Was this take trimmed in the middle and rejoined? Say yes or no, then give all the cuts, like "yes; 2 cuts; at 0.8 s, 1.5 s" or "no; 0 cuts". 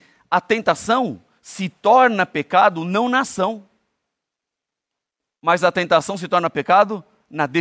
no; 0 cuts